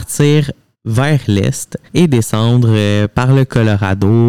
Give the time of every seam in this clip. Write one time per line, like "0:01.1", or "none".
0:01.9